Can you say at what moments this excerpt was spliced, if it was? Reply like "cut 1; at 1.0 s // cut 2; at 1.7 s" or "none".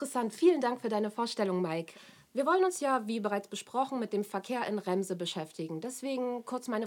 none